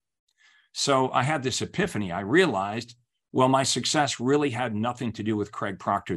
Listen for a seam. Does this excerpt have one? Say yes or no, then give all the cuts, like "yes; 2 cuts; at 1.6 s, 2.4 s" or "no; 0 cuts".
no; 0 cuts